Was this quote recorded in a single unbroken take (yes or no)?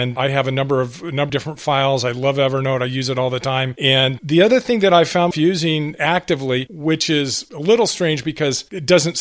no